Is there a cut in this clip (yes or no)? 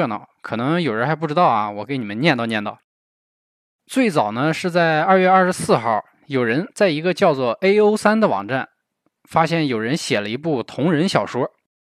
no